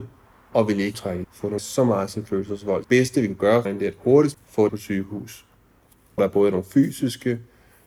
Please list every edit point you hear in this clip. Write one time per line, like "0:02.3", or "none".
0:00.9
0:01.2
0:01.6
0:02.8
0:03.7
0:04.3
0:04.7
0:06.2